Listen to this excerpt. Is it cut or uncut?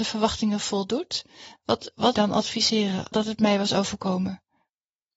cut